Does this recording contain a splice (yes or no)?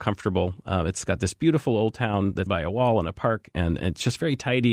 yes